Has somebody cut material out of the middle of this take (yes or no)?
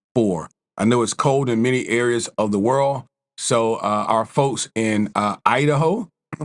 no